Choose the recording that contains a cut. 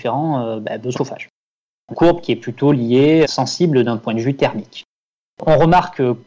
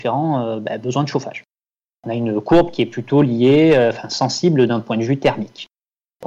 first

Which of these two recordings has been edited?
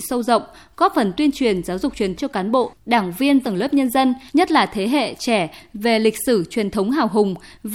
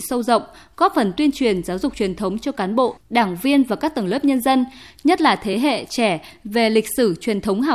first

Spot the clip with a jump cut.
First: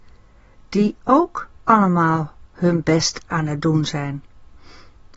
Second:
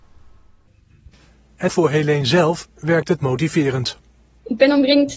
second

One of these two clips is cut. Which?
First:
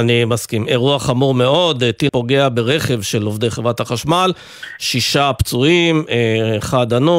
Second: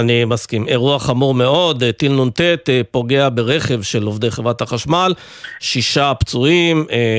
first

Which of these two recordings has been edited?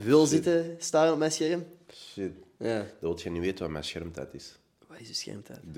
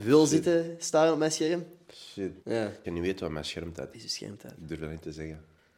second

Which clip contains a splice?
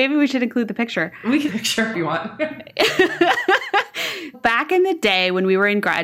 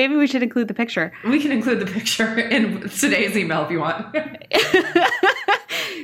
first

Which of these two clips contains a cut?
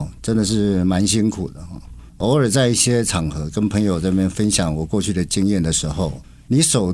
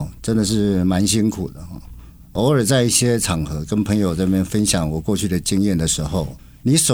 first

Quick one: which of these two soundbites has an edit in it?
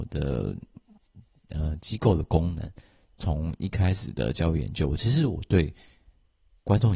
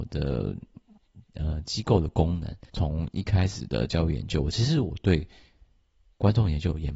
second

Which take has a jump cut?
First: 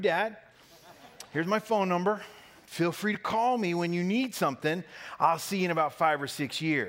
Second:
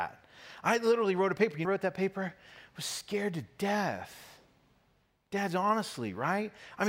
second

